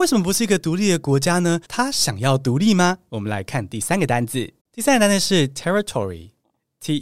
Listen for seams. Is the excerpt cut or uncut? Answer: cut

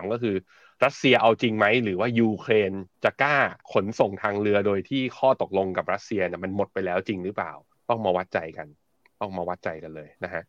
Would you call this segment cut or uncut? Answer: cut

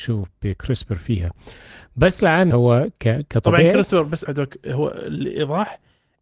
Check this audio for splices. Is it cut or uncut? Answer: cut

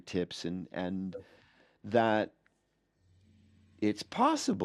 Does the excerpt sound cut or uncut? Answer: uncut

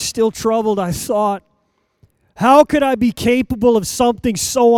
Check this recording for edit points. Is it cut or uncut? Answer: uncut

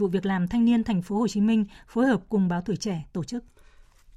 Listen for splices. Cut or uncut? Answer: uncut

